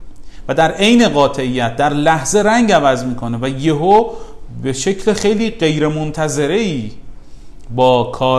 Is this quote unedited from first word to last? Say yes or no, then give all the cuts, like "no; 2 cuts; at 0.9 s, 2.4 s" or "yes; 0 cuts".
yes; 0 cuts